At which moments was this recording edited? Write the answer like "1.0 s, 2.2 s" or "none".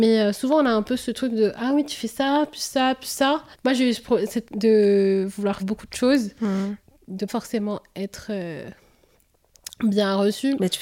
3.5 s, 4.4 s, 5.6 s, 7.3 s